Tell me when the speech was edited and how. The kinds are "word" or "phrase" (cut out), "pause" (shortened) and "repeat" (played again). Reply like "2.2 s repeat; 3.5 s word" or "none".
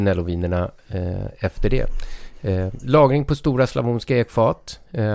none